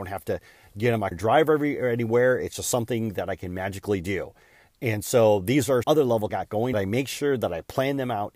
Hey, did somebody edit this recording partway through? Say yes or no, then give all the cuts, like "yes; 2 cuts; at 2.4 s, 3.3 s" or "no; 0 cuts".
yes; 4 cuts; at 1.1 s, 5.8 s, 6.3 s, 6.7 s